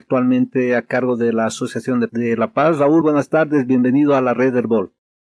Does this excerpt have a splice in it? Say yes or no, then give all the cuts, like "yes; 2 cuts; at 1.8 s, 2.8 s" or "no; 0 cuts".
yes; 2 cuts; at 2.1 s, 3.0 s